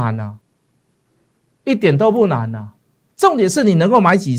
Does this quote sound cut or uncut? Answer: uncut